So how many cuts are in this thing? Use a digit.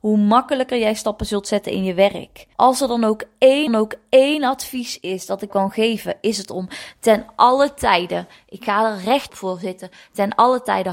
4